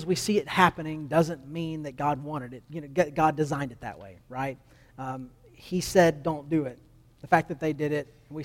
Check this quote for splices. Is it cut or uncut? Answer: uncut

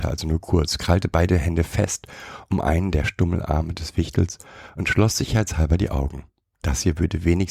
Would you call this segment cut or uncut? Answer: uncut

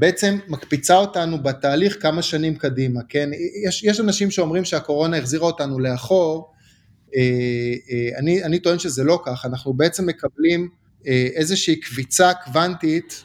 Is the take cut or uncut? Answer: cut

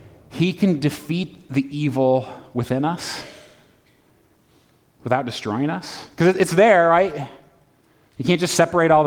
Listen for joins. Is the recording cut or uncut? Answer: uncut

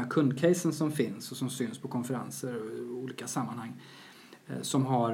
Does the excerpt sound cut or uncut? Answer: uncut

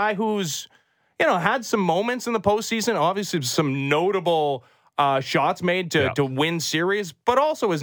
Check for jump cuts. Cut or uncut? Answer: uncut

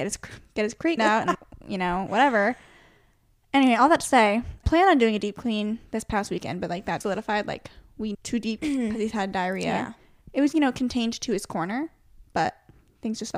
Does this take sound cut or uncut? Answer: cut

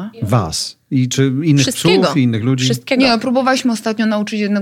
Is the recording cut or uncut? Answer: uncut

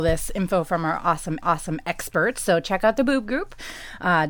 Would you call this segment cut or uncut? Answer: cut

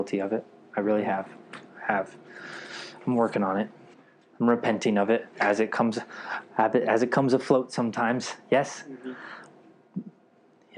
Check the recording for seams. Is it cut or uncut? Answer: cut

